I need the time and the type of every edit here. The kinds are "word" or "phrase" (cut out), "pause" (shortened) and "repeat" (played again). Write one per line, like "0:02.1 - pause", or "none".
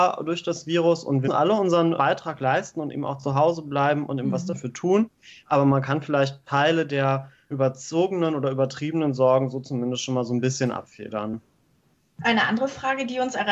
0:01.2 - word
0:02.0 - word
0:07.5 - word